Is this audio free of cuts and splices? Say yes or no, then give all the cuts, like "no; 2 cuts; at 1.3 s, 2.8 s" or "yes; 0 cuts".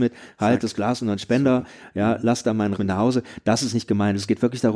no; 1 cut; at 2.8 s